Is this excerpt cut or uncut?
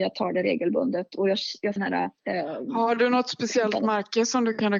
cut